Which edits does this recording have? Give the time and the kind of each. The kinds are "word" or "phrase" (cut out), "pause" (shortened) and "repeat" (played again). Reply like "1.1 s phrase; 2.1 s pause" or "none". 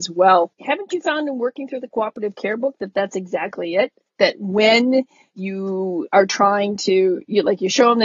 none